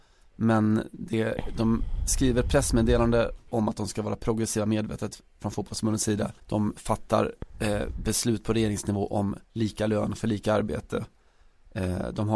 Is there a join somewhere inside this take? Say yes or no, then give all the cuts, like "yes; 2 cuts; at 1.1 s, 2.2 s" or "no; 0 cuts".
yes; 2 cuts; at 6.4 s, 9.4 s